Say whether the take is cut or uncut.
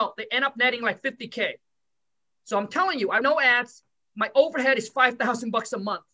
cut